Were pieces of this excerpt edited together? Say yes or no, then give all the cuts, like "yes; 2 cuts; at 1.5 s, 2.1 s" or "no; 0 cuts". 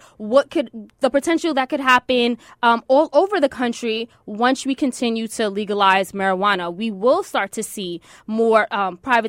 no; 0 cuts